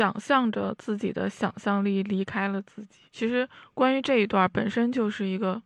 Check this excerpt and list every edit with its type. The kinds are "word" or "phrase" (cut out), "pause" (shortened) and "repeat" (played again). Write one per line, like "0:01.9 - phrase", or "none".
0:03.1 - pause